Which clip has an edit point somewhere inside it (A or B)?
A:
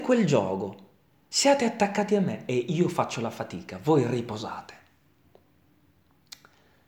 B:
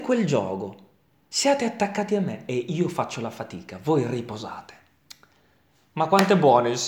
B